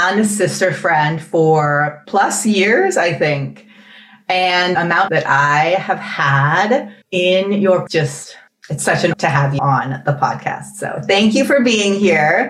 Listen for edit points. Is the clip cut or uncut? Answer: cut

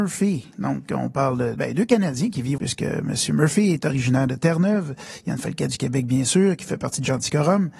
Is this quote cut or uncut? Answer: cut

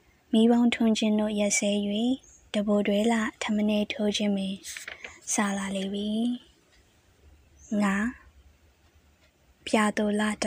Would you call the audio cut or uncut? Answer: uncut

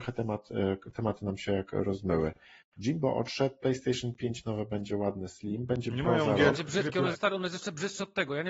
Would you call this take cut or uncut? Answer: cut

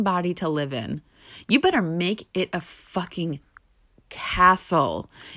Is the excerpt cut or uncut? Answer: uncut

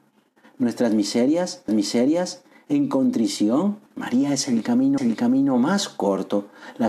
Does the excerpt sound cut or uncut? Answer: cut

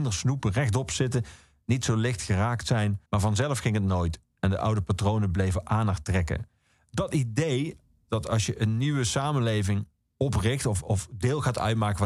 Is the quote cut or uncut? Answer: cut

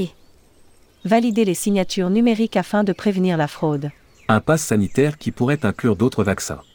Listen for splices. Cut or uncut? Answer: uncut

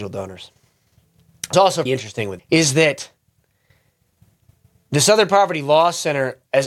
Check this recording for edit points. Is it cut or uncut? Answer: cut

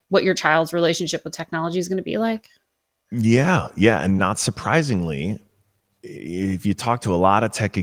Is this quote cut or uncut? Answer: uncut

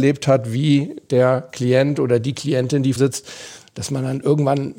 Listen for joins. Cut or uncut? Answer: cut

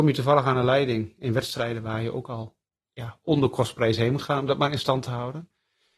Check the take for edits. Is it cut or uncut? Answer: uncut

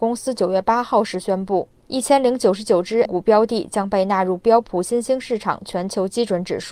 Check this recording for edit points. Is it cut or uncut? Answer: cut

